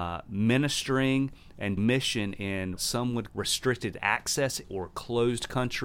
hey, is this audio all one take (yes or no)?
no